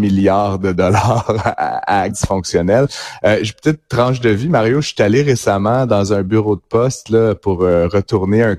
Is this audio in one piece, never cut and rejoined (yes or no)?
no